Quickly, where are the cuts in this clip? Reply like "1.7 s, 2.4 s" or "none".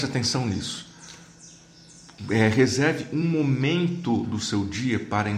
none